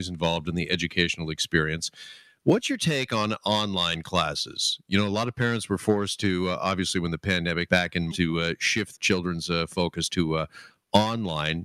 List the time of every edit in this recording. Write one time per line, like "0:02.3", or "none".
0:07.7
0:08.1
0:09.0